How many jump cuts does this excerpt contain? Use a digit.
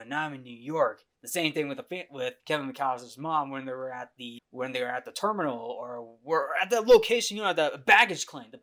2